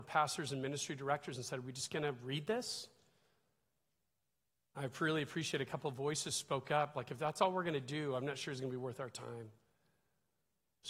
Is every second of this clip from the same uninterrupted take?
yes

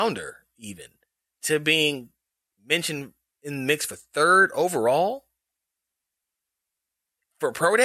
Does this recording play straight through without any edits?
yes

